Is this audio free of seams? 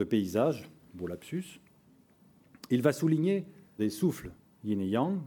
no; 1 cut; at 3.8 s

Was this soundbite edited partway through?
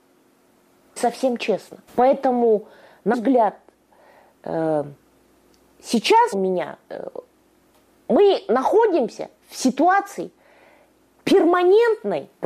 yes; 5 cuts; at 1.0 s, 1.9 s, 3.1 s, 6.3 s, 9.4 s

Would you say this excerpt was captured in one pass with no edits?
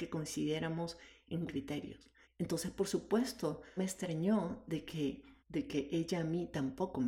no; 4 cuts; at 1.5 s, 2.2 s, 3.8 s, 5.4 s

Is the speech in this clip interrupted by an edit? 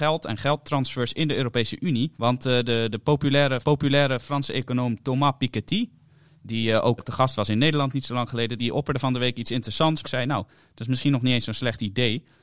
yes; 5 cuts; at 2.2 s, 3.6 s, 7.0 s, 8.6 s, 10.0 s

